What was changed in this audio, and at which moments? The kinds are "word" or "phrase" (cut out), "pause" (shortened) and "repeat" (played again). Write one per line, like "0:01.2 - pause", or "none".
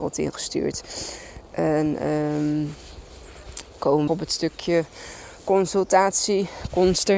0:04.1 - phrase